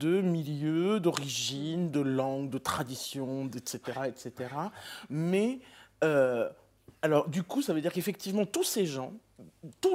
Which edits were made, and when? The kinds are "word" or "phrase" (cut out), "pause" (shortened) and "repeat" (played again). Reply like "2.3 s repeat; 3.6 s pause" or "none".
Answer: none